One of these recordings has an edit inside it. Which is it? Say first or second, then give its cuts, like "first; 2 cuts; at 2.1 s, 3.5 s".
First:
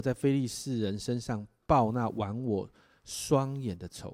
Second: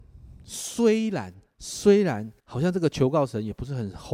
second; 2 cuts; at 1.5 s, 2.4 s